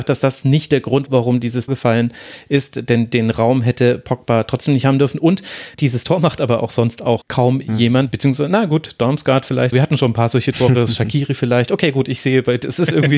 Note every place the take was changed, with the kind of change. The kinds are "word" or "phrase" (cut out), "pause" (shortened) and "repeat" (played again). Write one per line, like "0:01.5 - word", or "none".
0:01.1 - word
0:01.7 - word
0:05.7 - pause
0:07.2 - word
0:09.7 - word